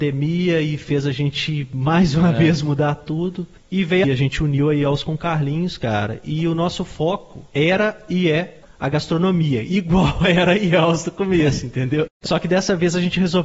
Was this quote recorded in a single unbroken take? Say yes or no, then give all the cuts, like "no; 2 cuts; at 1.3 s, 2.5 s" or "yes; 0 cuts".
no; 3 cuts; at 4.0 s, 7.5 s, 12.3 s